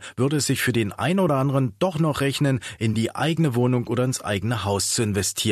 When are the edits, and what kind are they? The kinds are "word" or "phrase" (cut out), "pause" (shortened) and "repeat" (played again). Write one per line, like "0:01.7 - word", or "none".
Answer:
none